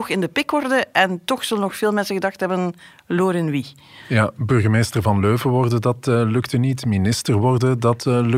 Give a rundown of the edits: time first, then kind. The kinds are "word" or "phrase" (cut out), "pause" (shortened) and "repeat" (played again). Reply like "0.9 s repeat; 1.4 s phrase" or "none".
none